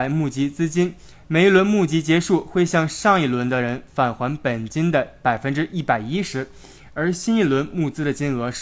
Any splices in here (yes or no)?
no